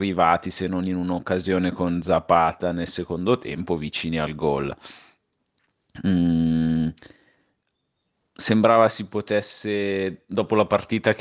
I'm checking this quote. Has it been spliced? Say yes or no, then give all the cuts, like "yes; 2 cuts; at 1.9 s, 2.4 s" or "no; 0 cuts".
no; 0 cuts